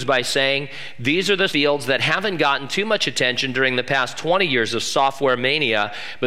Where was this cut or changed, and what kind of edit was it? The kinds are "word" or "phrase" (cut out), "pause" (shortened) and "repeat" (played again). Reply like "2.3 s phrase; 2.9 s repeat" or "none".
1.5 s phrase